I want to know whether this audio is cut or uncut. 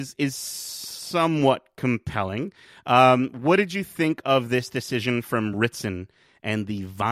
uncut